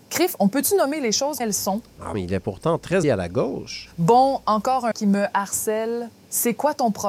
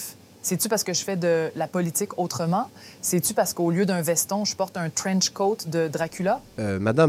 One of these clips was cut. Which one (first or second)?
first